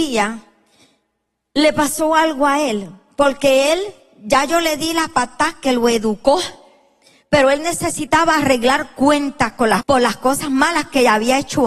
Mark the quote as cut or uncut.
cut